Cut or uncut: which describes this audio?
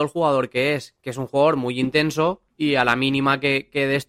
cut